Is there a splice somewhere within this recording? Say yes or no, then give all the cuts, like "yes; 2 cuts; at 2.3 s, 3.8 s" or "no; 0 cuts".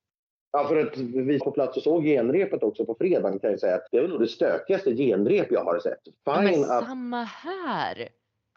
yes; 2 cuts; at 1.4 s, 3.9 s